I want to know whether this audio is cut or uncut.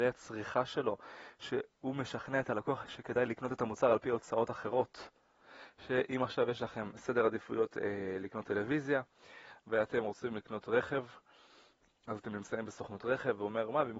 uncut